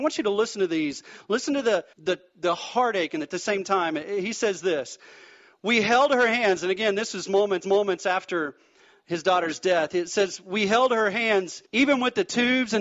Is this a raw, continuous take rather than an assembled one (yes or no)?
no